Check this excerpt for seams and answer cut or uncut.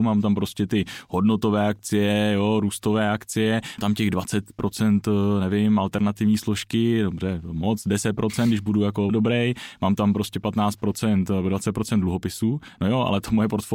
cut